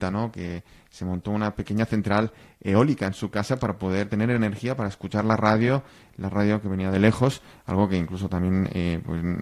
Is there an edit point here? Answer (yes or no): no